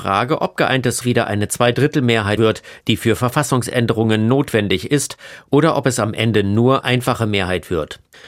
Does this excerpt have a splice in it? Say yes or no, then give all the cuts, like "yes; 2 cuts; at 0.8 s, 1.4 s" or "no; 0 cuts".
yes; 3 cuts; at 1.0 s, 2.4 s, 6.8 s